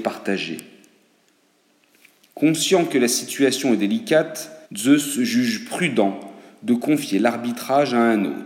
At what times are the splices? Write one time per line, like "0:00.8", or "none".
0:04.7